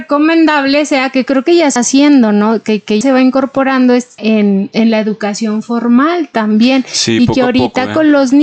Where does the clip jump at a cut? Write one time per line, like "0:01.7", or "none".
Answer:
0:01.8
0:03.0
0:04.2